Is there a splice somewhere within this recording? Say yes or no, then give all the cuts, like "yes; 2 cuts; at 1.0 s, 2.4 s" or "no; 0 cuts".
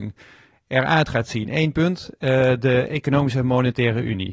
no; 0 cuts